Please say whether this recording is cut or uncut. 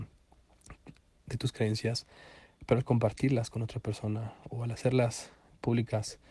uncut